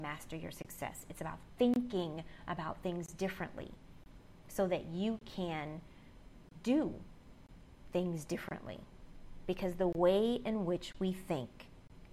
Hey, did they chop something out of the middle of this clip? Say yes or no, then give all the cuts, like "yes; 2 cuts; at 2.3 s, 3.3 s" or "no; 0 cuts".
no; 0 cuts